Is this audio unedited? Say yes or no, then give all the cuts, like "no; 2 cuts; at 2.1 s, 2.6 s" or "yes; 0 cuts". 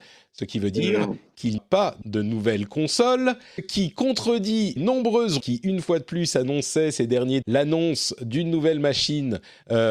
no; 6 cuts; at 1.6 s, 2.0 s, 3.6 s, 4.8 s, 5.4 s, 7.4 s